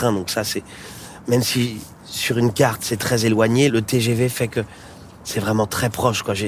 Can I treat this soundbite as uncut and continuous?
yes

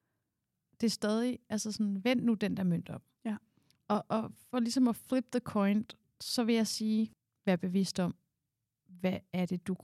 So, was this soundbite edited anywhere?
no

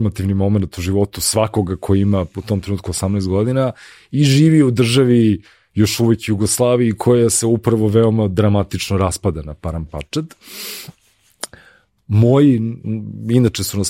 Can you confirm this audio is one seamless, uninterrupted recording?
yes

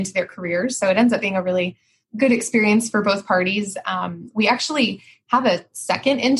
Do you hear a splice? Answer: no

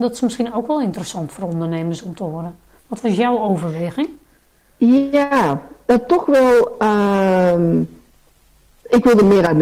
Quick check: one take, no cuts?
yes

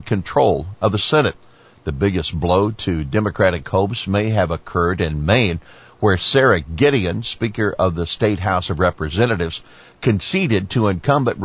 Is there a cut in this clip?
no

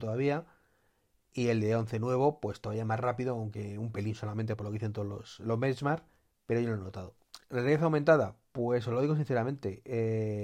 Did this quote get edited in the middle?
yes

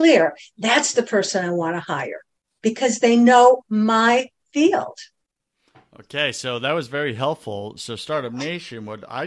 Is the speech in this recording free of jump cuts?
yes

